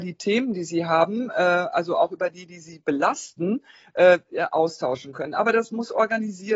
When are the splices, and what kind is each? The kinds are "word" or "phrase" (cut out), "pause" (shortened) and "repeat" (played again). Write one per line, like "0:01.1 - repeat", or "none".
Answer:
none